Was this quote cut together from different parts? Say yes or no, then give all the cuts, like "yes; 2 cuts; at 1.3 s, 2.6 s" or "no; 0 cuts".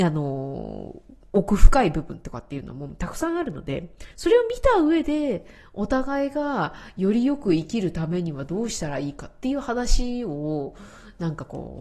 yes; 1 cut; at 4.1 s